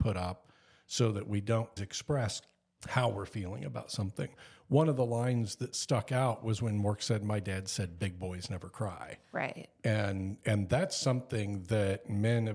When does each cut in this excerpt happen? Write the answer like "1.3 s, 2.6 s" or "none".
1.8 s